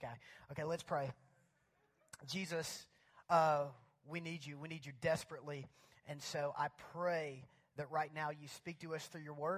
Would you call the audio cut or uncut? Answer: uncut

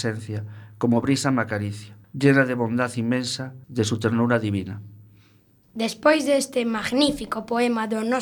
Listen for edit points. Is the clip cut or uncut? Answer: cut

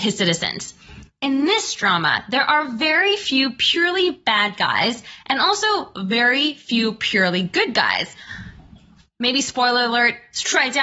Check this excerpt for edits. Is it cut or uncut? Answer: uncut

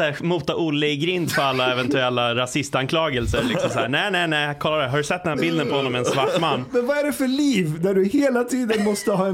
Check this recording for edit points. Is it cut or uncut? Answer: uncut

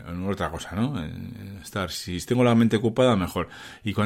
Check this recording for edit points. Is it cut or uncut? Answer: uncut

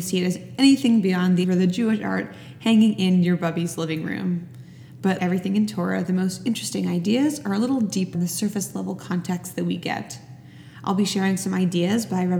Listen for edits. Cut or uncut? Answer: cut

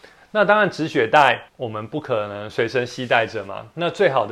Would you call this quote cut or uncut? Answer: cut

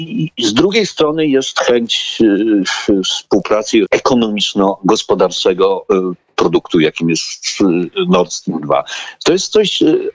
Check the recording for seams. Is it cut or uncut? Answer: cut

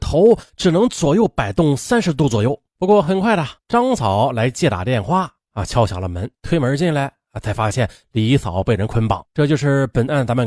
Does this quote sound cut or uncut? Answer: cut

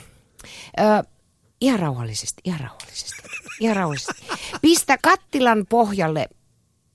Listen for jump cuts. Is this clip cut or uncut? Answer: cut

